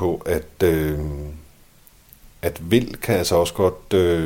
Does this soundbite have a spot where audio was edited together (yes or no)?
no